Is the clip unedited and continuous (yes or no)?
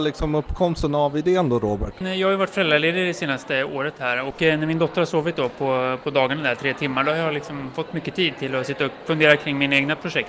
yes